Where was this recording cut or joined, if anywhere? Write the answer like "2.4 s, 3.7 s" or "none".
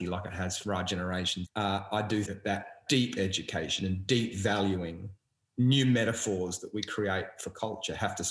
1.4 s, 2.2 s, 2.9 s